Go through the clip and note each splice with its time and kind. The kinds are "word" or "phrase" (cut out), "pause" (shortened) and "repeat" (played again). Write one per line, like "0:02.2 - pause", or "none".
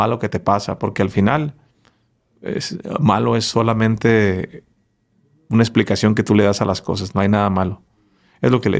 none

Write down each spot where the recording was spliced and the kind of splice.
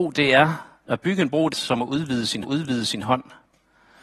0:01.5 - word
0:02.4 - repeat

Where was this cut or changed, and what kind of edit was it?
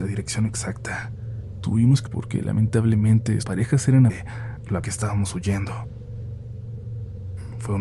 0:02.1 - word
0:03.4 - word
0:04.1 - word
0:04.8 - phrase

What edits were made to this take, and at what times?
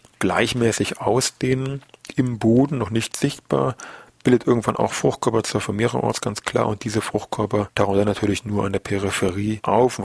none

